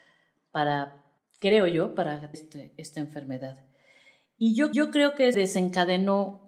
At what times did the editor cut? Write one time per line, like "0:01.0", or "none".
0:01.2
0:02.3
0:04.7
0:05.3